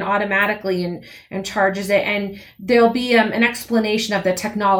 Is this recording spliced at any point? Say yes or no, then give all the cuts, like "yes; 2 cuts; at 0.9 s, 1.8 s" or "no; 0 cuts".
no; 0 cuts